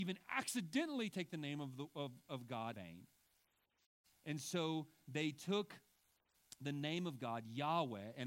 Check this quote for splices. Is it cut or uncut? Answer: cut